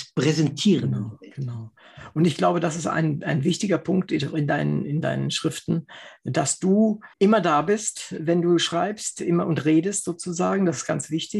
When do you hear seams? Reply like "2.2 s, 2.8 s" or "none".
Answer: 7.1 s